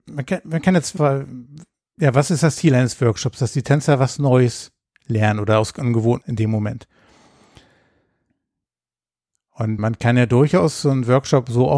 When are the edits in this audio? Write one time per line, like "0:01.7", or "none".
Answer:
0:01.0
0:06.2
0:09.8